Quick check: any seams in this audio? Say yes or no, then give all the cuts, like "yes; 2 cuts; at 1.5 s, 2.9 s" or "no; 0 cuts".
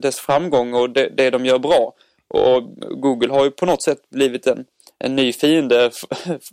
no; 0 cuts